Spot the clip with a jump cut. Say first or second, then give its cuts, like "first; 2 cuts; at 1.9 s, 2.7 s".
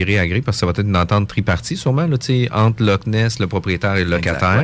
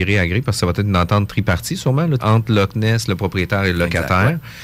second; 1 cut; at 2.2 s